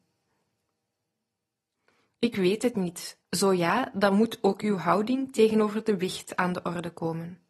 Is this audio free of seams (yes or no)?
no